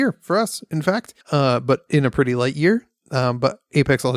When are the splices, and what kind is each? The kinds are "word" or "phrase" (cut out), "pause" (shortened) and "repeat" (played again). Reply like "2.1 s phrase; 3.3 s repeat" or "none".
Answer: 1.2 s pause